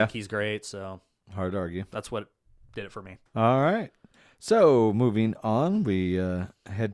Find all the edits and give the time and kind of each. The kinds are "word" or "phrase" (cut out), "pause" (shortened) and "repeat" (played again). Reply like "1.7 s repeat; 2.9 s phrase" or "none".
3.3 s pause